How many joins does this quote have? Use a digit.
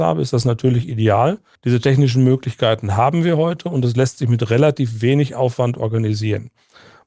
1